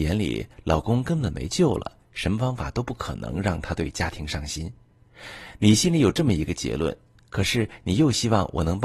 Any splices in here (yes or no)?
no